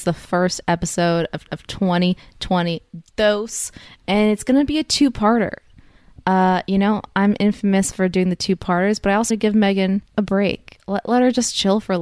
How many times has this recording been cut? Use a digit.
3